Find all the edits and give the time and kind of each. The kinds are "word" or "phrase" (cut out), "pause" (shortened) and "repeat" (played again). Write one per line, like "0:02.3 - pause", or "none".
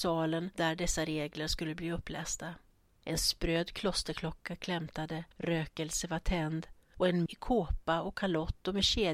0:05.3 - pause
0:07.3 - word